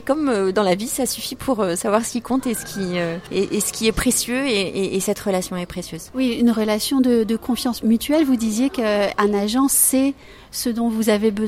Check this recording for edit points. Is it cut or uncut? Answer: uncut